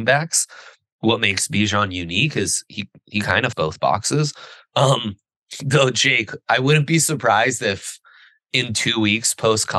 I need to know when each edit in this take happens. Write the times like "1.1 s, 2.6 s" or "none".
3.5 s